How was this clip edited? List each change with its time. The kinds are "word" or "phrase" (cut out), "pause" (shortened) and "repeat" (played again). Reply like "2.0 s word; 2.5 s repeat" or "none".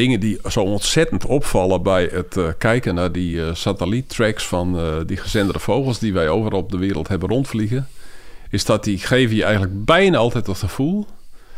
none

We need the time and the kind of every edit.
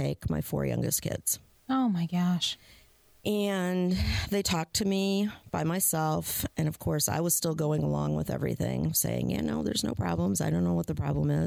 none

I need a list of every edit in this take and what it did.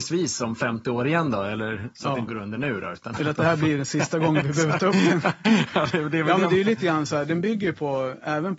2.3 s word

